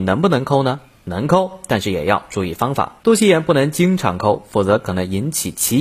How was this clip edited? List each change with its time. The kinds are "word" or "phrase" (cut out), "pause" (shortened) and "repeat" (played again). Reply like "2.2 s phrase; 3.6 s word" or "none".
3.0 s pause